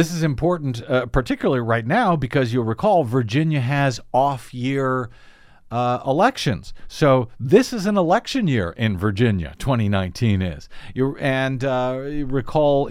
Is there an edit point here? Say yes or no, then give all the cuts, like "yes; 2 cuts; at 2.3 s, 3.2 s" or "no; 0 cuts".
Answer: no; 0 cuts